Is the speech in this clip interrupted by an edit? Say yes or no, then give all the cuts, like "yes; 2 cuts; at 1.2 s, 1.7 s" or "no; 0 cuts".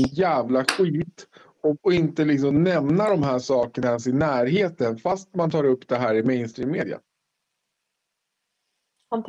no; 0 cuts